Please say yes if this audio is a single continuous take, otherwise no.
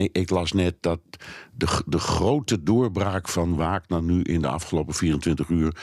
yes